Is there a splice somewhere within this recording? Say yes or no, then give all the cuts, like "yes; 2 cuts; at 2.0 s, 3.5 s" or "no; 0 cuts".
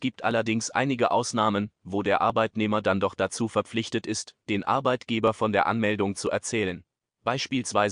no; 0 cuts